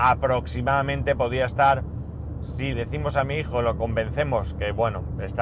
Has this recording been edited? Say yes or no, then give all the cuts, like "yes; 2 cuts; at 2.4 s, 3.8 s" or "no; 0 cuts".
yes; 1 cut; at 2.7 s